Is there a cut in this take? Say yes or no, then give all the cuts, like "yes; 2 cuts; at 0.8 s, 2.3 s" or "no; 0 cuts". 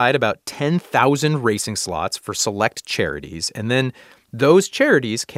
no; 0 cuts